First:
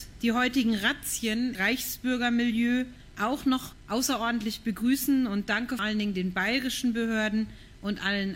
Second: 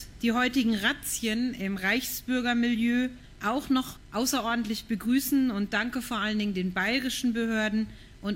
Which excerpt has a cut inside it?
first; 2 cuts; at 1.5 s, 5.8 s

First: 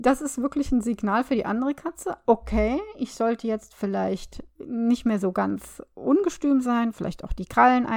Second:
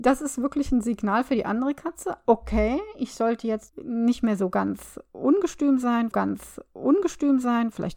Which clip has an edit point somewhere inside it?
second; 2 cuts; at 3.7 s, 6.1 s

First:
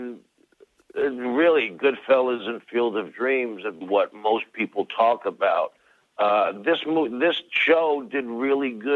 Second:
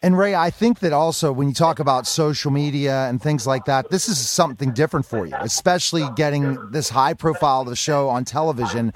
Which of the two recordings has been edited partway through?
first; 1 cut; at 3.8 s

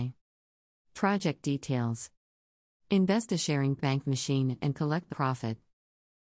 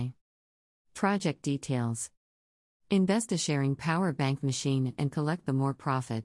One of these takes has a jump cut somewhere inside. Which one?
first; 2 cuts; at 3.8 s, 5.1 s

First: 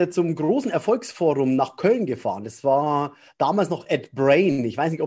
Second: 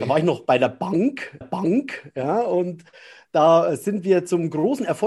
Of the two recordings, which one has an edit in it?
second; 1 cut; at 1.4 s

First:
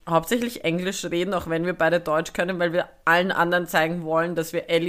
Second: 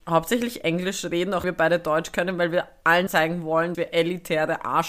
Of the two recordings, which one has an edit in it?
second; 3 cuts; at 1.4 s, 3.1 s, 3.7 s

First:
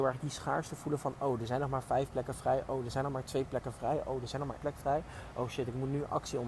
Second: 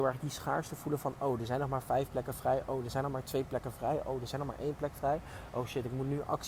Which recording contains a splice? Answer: first; 1 cut; at 4.6 s

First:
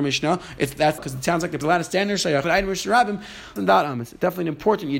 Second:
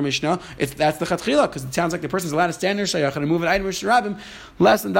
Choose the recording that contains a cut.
first; 4 cuts; at 1.0 s, 1.6 s, 2.4 s, 3.6 s

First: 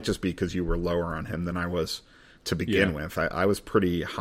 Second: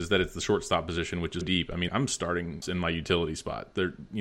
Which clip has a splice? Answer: second; 3 cuts; at 1.4 s, 1.9 s, 2.6 s

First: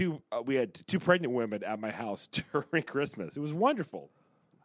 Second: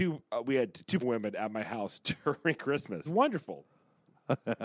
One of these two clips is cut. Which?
second; 2 cuts; at 1.0 s, 3.1 s

